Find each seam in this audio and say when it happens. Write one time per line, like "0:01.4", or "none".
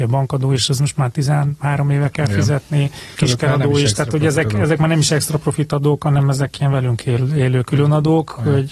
0:03.1